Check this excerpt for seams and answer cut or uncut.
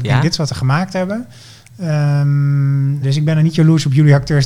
cut